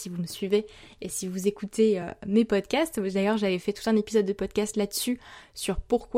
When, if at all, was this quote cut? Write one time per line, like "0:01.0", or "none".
none